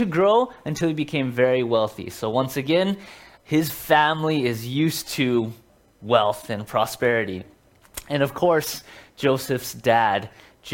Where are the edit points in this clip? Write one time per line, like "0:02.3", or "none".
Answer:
0:03.3